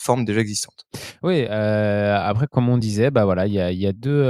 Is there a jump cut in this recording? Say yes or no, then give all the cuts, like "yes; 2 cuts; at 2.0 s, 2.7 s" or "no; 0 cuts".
no; 0 cuts